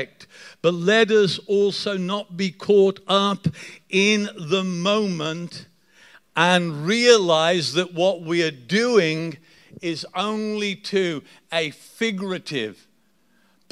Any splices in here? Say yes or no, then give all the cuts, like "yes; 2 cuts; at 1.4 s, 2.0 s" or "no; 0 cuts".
no; 0 cuts